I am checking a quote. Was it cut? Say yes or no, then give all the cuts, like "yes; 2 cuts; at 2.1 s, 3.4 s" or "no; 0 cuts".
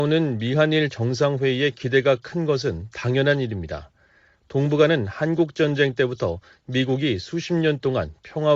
no; 0 cuts